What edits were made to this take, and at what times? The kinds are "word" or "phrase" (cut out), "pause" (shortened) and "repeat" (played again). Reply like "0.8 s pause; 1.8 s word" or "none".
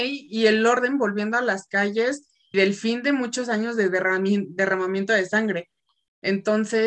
2.5 s word

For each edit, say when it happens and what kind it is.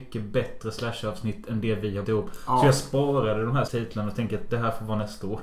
2.0 s word; 3.7 s word

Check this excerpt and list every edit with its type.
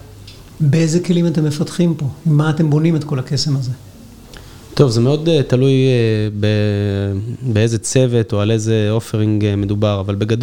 none

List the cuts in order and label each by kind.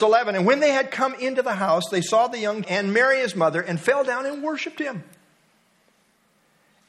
2.6 s word

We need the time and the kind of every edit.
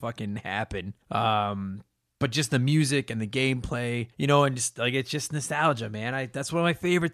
1.0 s pause; 4.1 s pause

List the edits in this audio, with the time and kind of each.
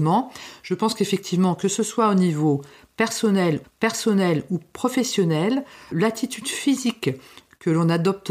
3.6 s repeat; 5.9 s word

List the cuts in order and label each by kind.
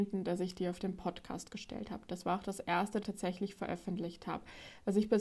3.0 s phrase

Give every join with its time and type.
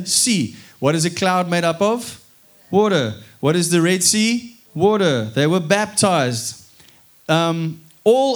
2.4 s pause; 4.7 s pause

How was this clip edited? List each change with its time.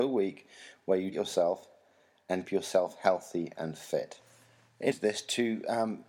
1.1 s word; 2.4 s word; 4.9 s word

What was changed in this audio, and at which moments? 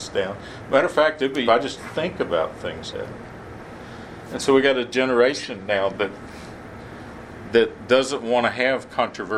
1.5 s phrase; 1.8 s word; 2.9 s word

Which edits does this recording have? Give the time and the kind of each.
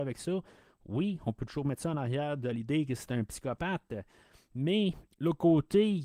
5.1 s pause

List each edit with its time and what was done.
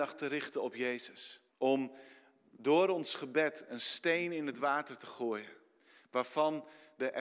1.5 s pause

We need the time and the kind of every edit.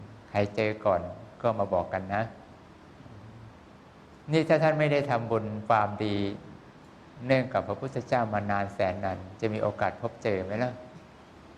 4.2 s pause

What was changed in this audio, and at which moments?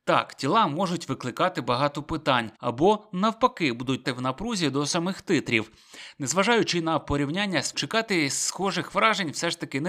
2.5 s pause; 4.0 s word; 7.7 s word

